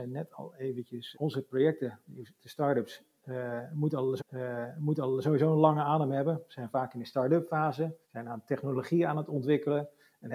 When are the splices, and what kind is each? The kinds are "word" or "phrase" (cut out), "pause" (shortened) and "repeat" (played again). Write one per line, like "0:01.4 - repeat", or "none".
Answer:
0:01.1 - word
0:04.2 - repeat
0:08.0 - pause